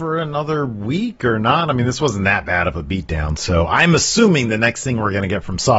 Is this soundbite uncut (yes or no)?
yes